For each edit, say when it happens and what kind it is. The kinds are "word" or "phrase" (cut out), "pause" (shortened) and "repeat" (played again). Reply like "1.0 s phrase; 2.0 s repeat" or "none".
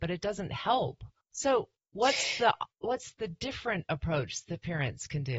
none

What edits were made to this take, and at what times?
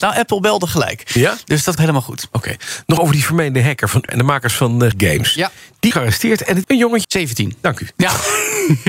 1.8 s word; 3.0 s word; 4.1 s word; 4.9 s word; 5.9 s word; 6.6 s word; 7.0 s word

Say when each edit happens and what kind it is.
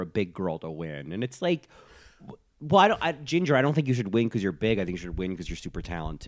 none

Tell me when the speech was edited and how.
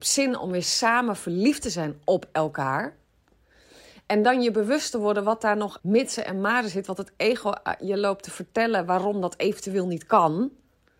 5.8 s word

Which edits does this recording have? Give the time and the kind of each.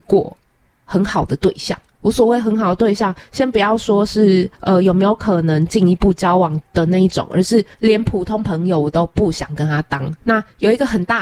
4.5 s pause; 6.6 s pause; 7.7 s pause; 10.2 s pause

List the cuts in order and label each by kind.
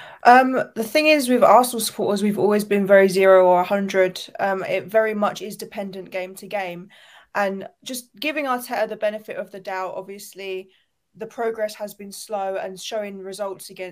none

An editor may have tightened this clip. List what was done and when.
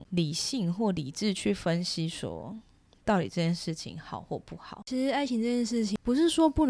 none

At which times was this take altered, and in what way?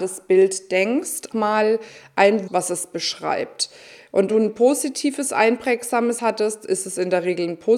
1.3 s word; 2.5 s word; 4.3 s word; 6.2 s word

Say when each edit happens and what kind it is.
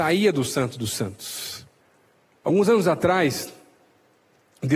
1.8 s pause

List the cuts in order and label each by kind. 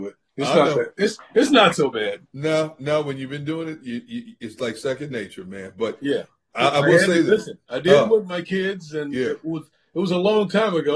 2.3 s pause

